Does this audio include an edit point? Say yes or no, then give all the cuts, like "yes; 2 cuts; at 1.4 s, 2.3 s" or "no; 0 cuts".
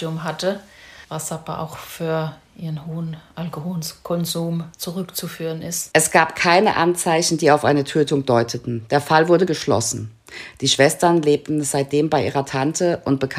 yes; 2 cuts; at 1.0 s, 4.7 s